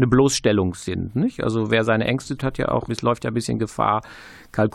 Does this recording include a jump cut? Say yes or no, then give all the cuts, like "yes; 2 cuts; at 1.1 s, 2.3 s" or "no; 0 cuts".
yes; 2 cuts; at 2.4 s, 2.9 s